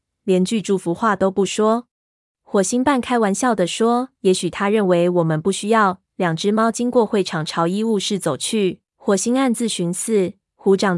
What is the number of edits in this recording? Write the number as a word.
three